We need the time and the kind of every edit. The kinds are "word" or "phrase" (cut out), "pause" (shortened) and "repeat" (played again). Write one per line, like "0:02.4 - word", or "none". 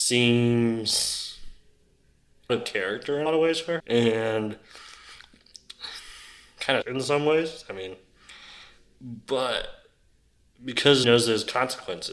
0:02.5 - word
0:03.3 - word
0:03.8 - word
0:06.8 - word
0:11.0 - word